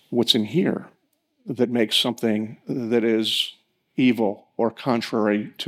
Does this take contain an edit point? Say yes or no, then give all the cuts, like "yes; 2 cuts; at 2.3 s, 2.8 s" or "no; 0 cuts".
no; 0 cuts